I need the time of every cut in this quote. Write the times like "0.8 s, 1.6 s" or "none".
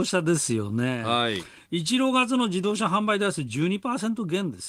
none